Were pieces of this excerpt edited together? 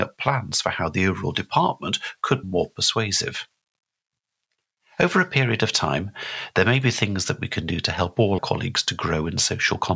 yes; 2 cuts; at 2.4 s, 8.4 s

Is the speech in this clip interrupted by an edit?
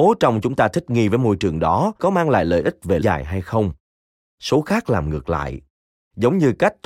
yes; 2 cuts; at 2.0 s, 3.0 s

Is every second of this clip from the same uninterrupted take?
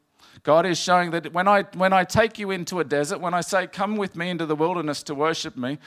yes; 0 cuts

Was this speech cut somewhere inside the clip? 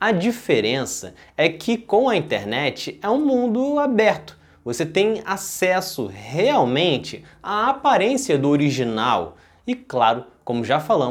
no; 0 cuts

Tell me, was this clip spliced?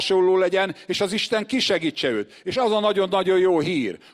no; 0 cuts

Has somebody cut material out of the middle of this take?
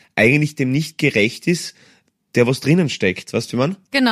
no; 0 cuts

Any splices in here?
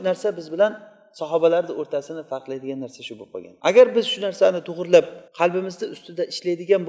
yes; 2 cuts; at 3.6 s, 5.3 s

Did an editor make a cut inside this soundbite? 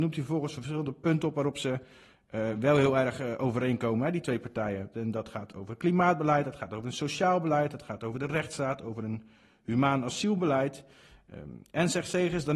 no; 0 cuts

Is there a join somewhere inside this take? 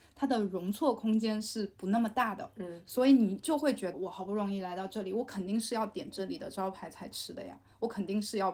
yes; 1 cut; at 3.9 s

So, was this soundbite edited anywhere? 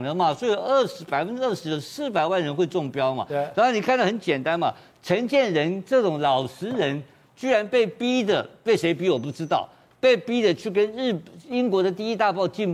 no; 0 cuts

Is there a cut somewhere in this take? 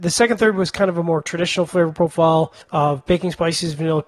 yes; 1 cut; at 2.6 s

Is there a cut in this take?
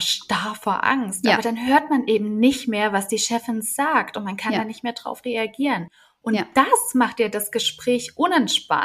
no; 0 cuts

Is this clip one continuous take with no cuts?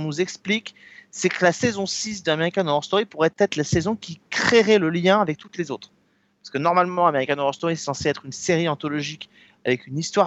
yes; 0 cuts

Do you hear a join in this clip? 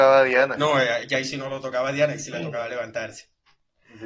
no; 0 cuts

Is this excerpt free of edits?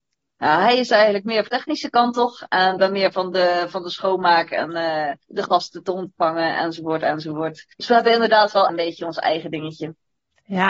no; 5 cuts; at 1.5 s, 2.8 s, 5.2 s, 7.7 s, 8.7 s

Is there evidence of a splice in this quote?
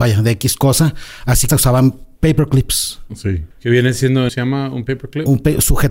yes; 4 cuts; at 1.5 s, 2.2 s, 3.5 s, 4.3 s

